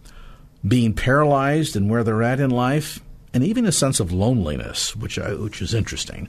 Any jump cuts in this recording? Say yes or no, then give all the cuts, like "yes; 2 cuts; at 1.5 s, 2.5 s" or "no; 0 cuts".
no; 0 cuts